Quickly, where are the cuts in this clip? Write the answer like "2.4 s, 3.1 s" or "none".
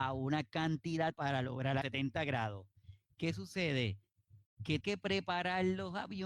1.1 s, 1.8 s, 4.8 s